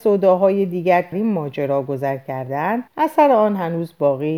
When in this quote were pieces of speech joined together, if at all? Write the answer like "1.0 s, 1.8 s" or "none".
1.1 s, 2.9 s